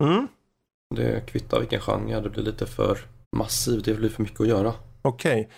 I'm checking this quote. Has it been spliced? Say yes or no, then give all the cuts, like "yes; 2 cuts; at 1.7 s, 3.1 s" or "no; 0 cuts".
yes; 1 cut; at 3.2 s